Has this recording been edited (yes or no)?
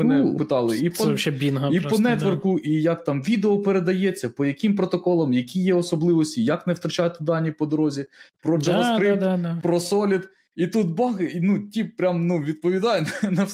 no